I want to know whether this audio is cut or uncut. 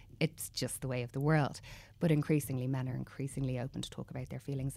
uncut